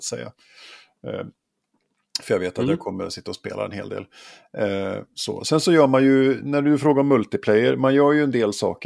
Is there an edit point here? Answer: no; 0 cuts

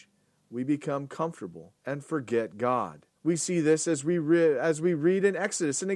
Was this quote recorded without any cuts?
no; 2 cuts; at 1.8 s, 3.1 s

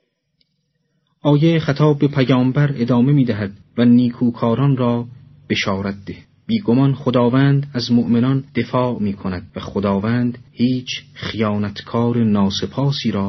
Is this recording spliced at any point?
yes; 5 cuts; at 3.6 s, 6.2 s, 8.5 s, 9.5 s, 10.5 s

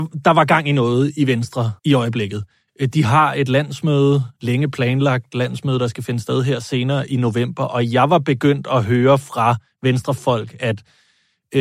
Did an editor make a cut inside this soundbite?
yes; 1 cut; at 1.8 s

